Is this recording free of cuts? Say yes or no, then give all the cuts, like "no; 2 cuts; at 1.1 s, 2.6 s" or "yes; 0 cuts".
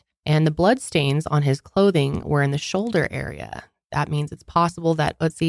yes; 0 cuts